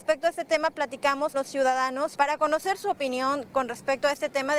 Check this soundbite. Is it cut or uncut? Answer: cut